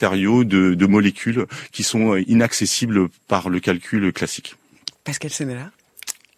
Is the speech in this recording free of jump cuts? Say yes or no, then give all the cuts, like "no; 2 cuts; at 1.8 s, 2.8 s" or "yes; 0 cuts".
yes; 0 cuts